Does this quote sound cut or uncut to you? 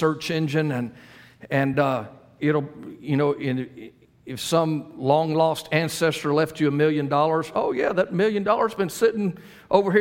uncut